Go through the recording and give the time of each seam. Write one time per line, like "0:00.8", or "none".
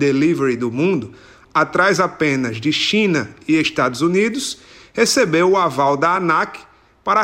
none